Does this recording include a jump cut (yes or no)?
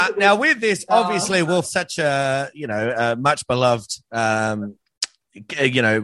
yes